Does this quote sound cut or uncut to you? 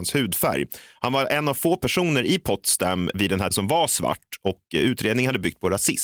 cut